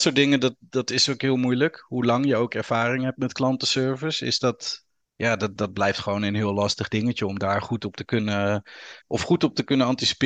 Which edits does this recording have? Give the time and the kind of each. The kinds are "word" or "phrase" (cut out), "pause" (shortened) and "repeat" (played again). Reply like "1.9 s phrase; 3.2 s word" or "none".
5.0 s pause; 5.6 s word; 9.0 s pause